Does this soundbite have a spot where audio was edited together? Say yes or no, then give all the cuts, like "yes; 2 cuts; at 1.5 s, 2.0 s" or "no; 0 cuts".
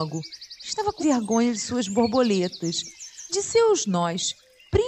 yes; 2 cuts; at 1.0 s, 3.3 s